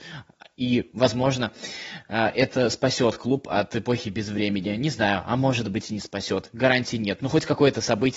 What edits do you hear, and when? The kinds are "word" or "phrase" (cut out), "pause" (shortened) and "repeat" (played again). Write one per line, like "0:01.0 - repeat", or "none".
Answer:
none